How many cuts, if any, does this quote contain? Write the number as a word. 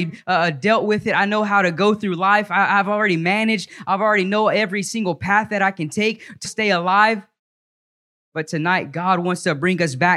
one